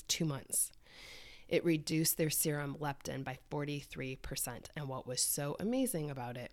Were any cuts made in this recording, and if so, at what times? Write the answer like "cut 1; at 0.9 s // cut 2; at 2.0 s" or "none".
none